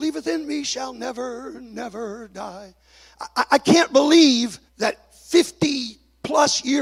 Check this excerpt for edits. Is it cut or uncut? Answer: cut